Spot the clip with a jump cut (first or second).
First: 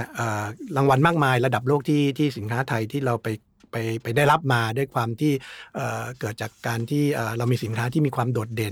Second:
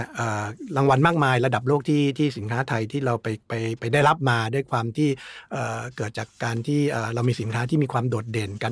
second